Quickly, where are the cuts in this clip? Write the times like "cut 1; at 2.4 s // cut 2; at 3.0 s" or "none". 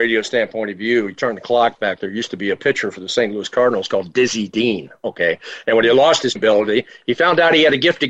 cut 1; at 6.4 s